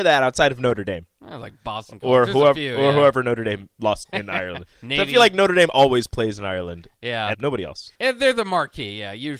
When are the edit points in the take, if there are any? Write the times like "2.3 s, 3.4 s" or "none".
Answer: 1.1 s, 4.0 s, 7.3 s, 7.9 s